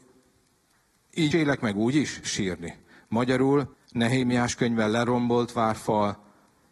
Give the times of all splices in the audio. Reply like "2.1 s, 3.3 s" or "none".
1.3 s, 2.2 s, 3.7 s